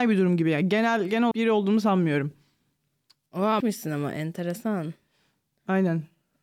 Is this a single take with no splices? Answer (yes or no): no